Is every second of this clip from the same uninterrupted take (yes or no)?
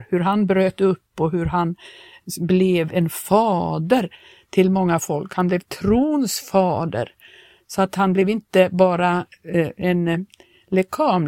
yes